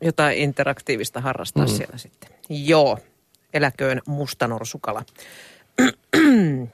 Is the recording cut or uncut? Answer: uncut